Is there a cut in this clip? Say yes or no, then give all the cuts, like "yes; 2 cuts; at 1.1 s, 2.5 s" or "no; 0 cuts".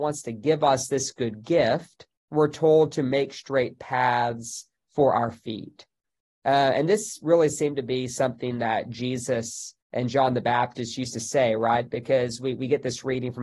yes; 2 cuts; at 2.2 s, 9.8 s